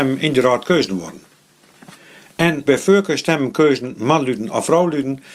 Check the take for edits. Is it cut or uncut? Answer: cut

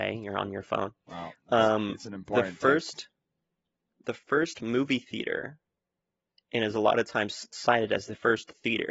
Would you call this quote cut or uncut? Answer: uncut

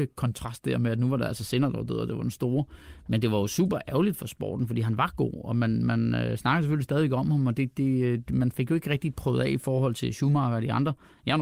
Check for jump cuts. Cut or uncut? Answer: uncut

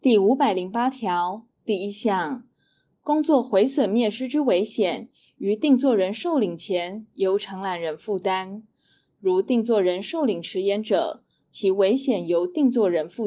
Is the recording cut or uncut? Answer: cut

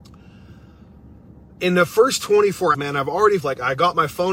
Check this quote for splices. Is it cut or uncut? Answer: cut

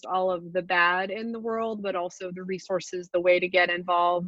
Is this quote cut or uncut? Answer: uncut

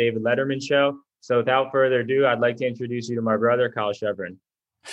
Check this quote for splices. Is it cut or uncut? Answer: uncut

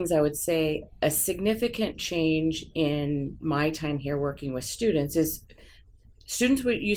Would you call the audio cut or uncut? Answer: uncut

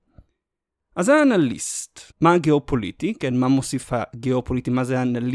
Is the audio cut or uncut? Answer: cut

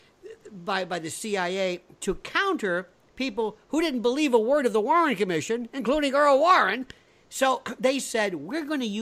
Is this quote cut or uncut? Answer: uncut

